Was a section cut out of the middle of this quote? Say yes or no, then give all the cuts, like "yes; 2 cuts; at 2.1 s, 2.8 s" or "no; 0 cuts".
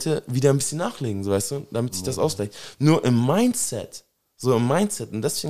no; 0 cuts